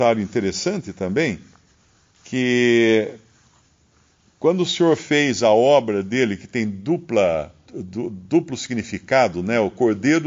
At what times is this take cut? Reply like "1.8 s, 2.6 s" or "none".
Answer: 7.7 s